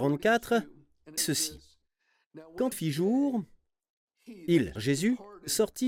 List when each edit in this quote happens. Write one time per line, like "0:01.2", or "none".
0:01.2
0:02.7
0:04.8